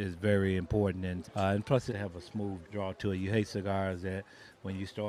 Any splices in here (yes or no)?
yes